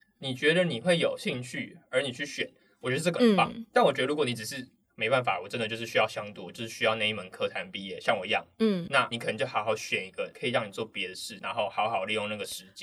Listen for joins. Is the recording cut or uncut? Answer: cut